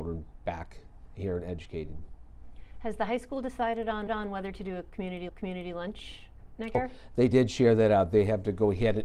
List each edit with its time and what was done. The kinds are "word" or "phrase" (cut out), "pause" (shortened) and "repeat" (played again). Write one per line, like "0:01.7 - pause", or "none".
0:04.1 - repeat
0:05.3 - repeat
0:06.7 - word